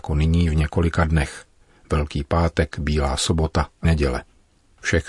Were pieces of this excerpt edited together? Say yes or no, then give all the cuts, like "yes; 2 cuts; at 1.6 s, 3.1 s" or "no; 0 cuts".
yes; 1 cut; at 3.8 s